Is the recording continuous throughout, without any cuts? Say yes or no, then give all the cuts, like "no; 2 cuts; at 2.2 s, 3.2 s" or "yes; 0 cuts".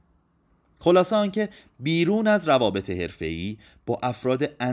yes; 0 cuts